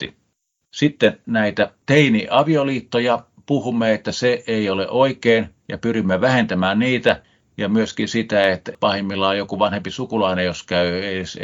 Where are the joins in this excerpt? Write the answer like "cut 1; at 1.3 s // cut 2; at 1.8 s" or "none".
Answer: cut 1; at 5.6 s